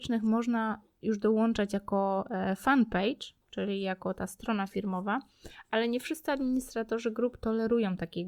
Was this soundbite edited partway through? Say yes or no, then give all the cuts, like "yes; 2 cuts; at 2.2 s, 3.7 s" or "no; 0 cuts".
yes; 1 cut; at 3.4 s